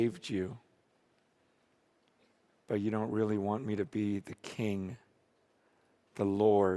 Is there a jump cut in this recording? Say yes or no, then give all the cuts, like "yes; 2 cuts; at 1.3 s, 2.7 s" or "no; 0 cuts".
no; 0 cuts